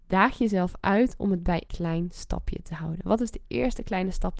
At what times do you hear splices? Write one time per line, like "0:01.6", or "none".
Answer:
0:01.7